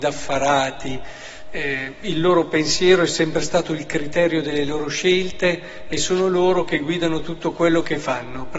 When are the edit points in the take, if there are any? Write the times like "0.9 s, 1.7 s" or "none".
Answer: none